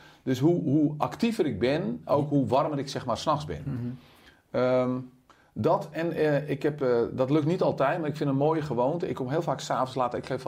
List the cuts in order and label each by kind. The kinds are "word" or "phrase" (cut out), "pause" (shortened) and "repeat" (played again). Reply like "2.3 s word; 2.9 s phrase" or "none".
5.3 s pause